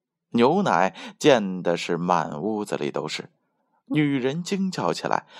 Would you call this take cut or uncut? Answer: uncut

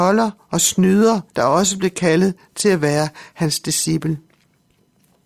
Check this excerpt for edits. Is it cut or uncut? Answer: cut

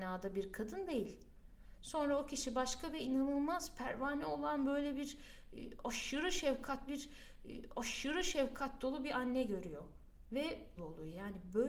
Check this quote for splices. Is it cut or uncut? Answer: cut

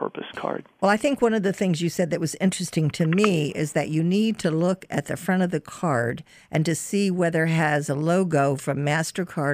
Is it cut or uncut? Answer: uncut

